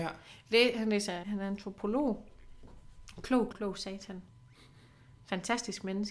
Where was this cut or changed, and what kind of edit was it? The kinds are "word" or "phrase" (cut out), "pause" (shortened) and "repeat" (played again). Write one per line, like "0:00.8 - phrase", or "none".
0:01.2 - word
0:03.5 - word